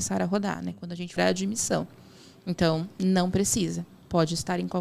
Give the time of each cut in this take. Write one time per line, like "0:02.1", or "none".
0:01.2